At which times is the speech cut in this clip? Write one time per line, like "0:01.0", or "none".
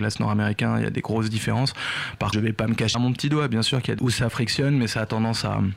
0:02.3
0:02.9
0:04.0